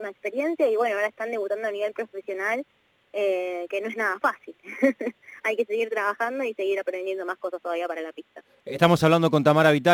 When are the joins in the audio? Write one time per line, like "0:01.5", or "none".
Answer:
none